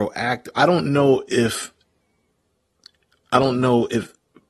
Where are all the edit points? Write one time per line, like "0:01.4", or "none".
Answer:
none